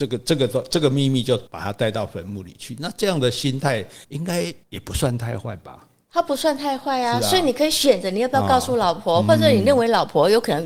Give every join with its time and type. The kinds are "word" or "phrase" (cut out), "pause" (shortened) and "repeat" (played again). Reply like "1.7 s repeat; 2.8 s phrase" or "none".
1.5 s pause; 4.0 s pause; 4.6 s pause